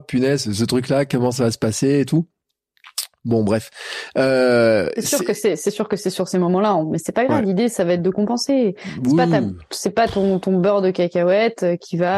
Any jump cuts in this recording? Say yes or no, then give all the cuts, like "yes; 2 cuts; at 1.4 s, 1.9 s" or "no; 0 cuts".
no; 0 cuts